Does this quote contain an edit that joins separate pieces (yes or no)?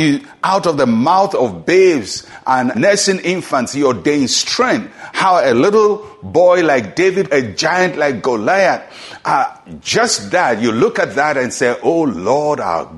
yes